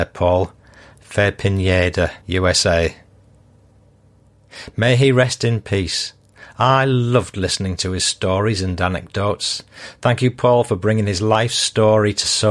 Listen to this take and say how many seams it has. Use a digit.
1